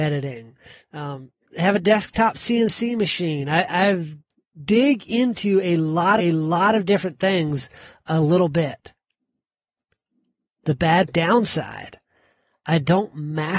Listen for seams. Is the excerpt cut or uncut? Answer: cut